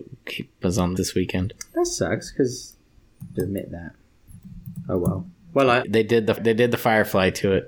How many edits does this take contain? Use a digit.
4